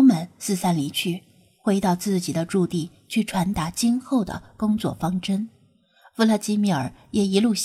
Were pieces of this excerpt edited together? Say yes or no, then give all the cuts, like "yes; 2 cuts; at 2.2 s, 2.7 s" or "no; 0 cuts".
no; 0 cuts